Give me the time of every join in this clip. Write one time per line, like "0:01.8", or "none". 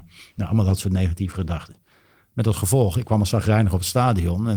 none